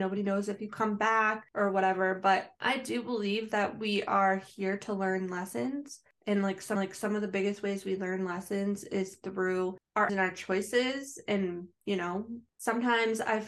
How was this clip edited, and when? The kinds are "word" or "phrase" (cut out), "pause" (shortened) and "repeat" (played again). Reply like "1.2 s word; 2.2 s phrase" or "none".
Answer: 6.8 s repeat; 10.1 s word; 11.8 s pause